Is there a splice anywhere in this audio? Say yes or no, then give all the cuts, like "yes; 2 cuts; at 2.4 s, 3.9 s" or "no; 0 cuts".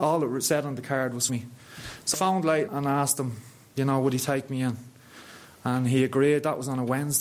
yes; 3 cuts; at 1.3 s, 2.1 s, 2.7 s